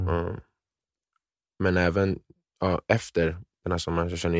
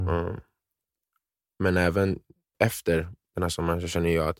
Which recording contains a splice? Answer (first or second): second